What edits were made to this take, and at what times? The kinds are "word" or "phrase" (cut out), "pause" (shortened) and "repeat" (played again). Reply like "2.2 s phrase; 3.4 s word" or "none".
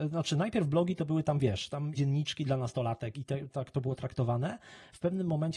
2.0 s word; 3.1 s word; 3.5 s word